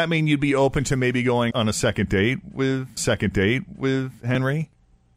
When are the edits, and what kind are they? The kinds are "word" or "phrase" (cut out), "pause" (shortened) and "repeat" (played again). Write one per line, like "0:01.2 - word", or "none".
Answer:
0:01.5 - word
0:03.0 - repeat